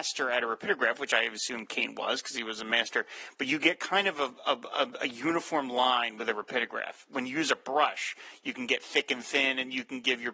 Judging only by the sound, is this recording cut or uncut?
uncut